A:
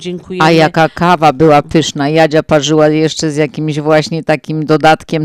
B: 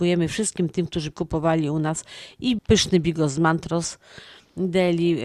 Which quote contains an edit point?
B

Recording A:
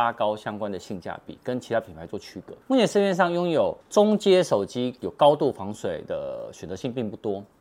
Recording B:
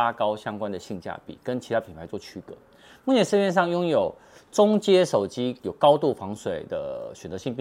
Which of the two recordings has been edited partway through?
A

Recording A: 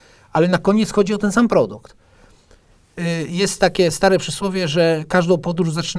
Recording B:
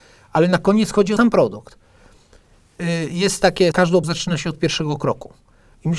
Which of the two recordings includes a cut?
B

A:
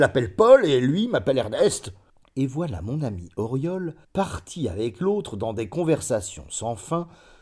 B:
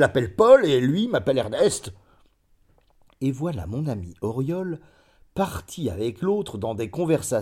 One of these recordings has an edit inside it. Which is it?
A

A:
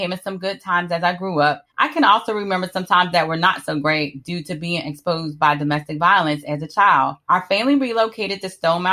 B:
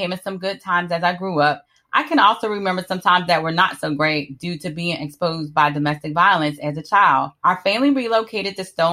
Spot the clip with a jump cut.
A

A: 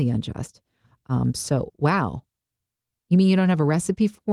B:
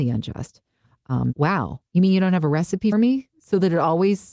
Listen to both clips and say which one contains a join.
B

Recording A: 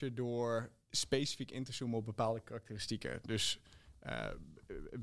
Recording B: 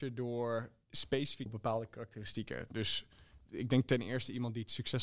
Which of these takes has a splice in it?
B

